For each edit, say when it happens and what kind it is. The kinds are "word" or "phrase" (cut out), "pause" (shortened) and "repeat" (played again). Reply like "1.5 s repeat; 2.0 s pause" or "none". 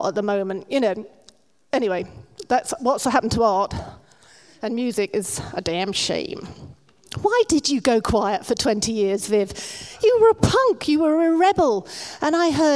none